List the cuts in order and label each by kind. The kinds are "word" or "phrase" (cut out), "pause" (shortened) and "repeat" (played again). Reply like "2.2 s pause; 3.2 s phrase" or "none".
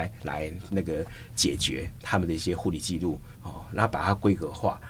3.3 s pause